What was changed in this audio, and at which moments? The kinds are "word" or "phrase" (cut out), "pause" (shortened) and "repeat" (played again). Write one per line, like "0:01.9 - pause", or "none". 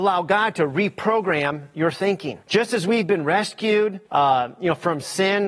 0:02.4 - pause
0:04.1 - pause